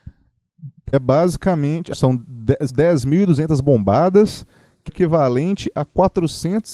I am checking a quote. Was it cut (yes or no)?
yes